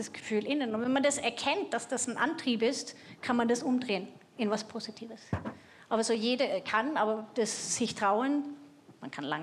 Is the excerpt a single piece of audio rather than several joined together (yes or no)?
yes